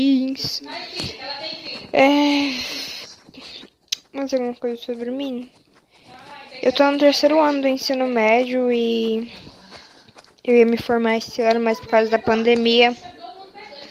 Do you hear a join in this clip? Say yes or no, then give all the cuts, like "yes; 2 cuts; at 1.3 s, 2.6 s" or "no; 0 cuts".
no; 0 cuts